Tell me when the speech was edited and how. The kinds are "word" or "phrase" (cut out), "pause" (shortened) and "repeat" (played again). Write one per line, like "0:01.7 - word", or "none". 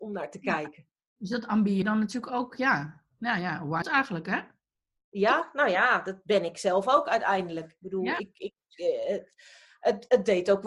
0:01.8 - word
0:03.8 - word

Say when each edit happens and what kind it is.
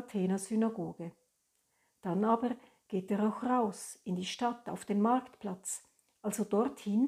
none

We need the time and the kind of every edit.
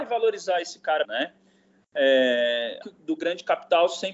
0:01.0 - word
0:02.8 - word

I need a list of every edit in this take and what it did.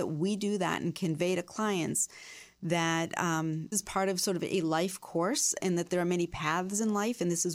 0:03.7 - word

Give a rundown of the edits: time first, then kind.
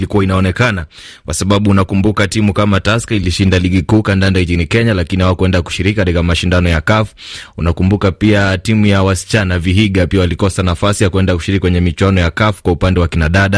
none

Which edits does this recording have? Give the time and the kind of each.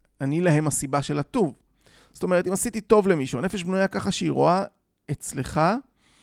none

